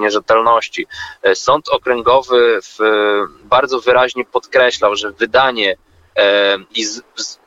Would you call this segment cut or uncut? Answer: uncut